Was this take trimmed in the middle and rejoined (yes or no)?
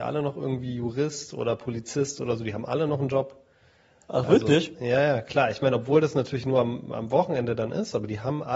no